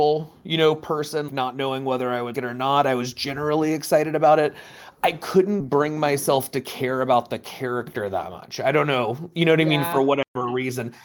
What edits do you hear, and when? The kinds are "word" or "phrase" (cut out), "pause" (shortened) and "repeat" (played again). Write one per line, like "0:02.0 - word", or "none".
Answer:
0:01.3 - word
0:02.3 - word